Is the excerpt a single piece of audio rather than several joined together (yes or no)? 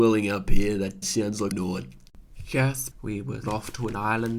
no